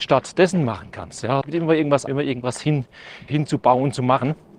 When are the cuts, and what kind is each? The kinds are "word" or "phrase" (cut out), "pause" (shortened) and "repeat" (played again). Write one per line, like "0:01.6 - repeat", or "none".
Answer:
0:01.4 - word
0:02.1 - word
0:03.3 - word